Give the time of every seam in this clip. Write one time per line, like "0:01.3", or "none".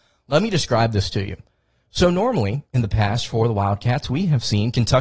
none